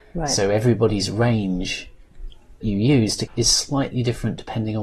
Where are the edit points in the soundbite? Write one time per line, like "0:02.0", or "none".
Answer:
0:02.6
0:03.3